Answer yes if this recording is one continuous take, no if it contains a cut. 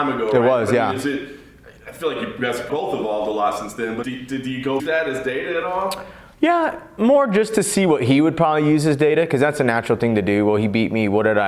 no